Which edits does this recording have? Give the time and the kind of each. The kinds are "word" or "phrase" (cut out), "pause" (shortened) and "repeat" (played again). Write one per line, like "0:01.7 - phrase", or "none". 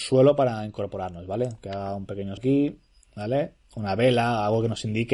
0:02.4 - word
0:03.6 - pause